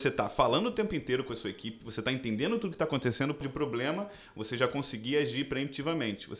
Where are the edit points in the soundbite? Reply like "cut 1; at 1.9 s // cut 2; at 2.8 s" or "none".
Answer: cut 1; at 3.4 s